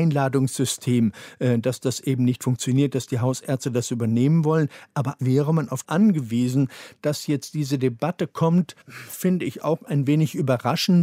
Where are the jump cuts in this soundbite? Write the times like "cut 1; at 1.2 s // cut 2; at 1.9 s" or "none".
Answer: cut 1; at 5.2 s // cut 2; at 5.8 s // cut 3; at 8.8 s

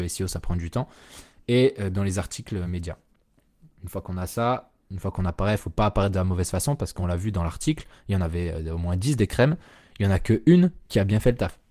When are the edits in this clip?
none

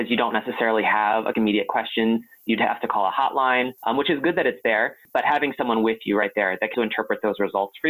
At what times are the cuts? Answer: cut 1; at 1.3 s // cut 2; at 3.8 s // cut 3; at 6.7 s

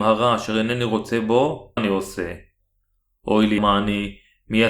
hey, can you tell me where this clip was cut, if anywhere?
cut 1; at 1.8 s // cut 2; at 3.6 s

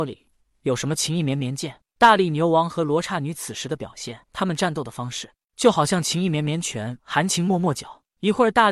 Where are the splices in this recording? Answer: cut 1; at 4.2 s // cut 2; at 7.0 s

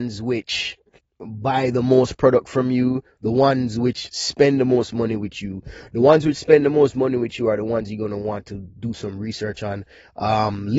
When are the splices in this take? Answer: cut 1; at 1.0 s

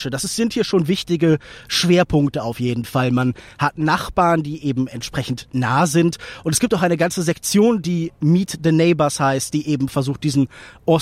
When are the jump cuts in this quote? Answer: none

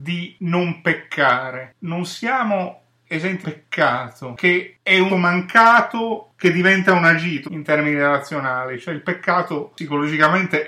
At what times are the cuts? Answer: cut 1; at 3.4 s // cut 2; at 4.4 s // cut 3; at 5.1 s // cut 4; at 7.4 s

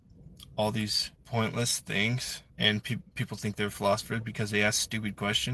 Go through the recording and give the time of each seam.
cut 1; at 1.2 s // cut 2; at 2.5 s

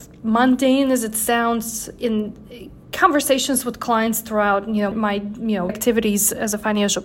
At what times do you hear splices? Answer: cut 1; at 4.9 s // cut 2; at 5.7 s

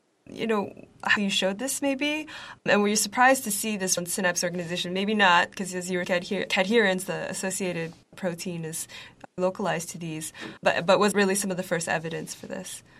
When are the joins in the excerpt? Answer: cut 1; at 1.2 s // cut 2; at 2.6 s // cut 3; at 4.0 s // cut 4; at 6.0 s // cut 5; at 6.5 s // cut 6; at 8.0 s // cut 7; at 9.4 s // cut 8; at 10.6 s // cut 9; at 11.1 s

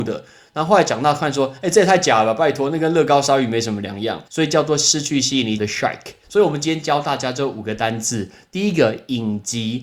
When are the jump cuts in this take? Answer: cut 1; at 4.3 s // cut 2; at 5.6 s // cut 3; at 6.2 s

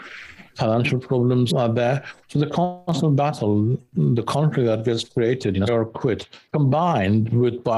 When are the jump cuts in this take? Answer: cut 1; at 1.5 s // cut 2; at 5.7 s

